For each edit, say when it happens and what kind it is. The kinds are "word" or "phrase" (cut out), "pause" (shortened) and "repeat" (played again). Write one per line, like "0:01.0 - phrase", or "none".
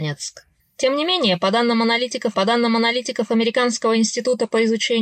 0:02.3 - repeat